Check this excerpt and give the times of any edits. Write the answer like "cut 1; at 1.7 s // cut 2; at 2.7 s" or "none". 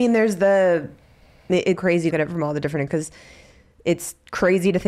cut 1; at 1.8 s // cut 2; at 2.1 s // cut 3; at 2.9 s